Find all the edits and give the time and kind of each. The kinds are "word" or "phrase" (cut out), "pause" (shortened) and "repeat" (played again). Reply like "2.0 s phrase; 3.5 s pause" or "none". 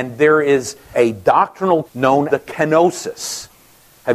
0.9 s word; 1.8 s word; 2.3 s word